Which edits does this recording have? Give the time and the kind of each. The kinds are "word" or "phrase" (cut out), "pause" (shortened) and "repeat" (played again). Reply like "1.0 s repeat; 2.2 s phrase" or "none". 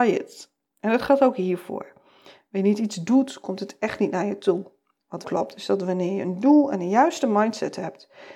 5.2 s word